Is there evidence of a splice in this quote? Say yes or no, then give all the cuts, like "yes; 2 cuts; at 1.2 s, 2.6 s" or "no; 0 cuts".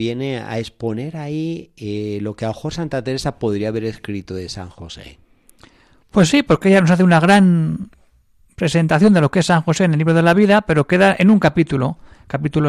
no; 0 cuts